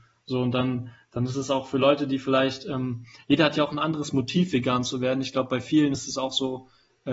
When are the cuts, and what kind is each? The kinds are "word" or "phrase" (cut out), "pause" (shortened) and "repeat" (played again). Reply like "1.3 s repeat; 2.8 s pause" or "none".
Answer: none